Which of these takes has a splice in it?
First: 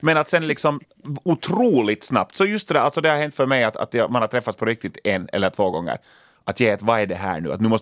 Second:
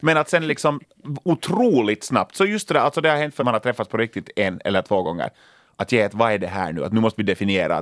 second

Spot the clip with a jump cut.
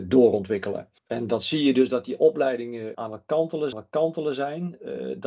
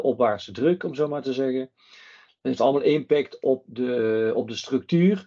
first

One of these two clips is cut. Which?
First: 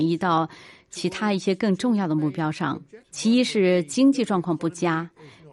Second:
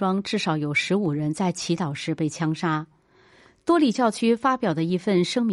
first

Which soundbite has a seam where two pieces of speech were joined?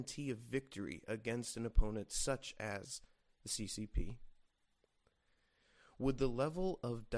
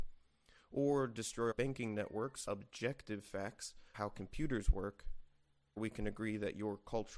second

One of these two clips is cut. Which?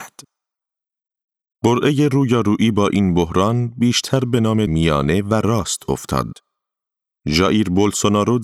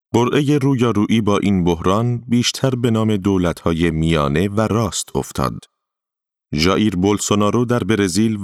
first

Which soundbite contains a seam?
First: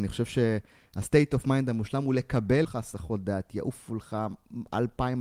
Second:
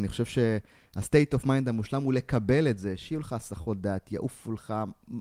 first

